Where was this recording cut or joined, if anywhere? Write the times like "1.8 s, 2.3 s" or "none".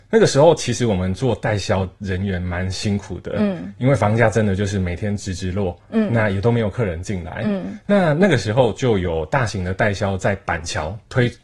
none